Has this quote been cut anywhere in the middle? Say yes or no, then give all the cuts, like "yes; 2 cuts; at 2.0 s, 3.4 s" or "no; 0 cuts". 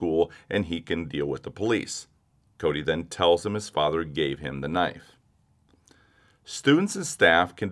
yes; 1 cut; at 2.2 s